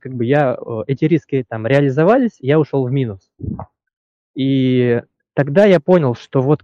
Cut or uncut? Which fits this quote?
uncut